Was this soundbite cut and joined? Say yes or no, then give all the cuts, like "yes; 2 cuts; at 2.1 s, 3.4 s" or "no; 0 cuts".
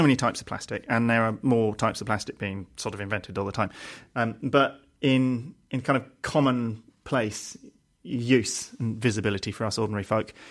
no; 0 cuts